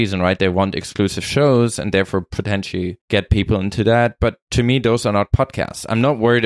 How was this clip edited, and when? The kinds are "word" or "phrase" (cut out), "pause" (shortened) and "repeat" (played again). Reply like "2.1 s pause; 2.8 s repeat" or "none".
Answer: 3.0 s pause